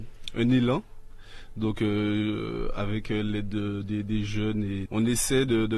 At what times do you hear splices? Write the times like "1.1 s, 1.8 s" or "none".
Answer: 4.9 s